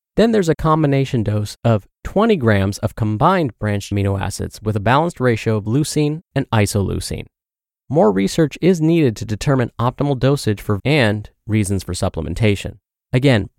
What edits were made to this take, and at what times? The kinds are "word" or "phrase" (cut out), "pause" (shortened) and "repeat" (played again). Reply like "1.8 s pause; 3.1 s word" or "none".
3.9 s word; 10.8 s word